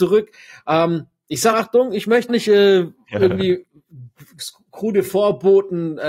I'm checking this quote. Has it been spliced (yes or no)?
yes